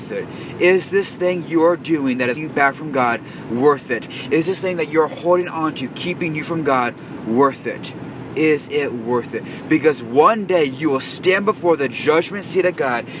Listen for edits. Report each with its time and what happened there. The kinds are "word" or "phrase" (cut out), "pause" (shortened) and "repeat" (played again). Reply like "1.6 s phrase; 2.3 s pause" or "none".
2.4 s word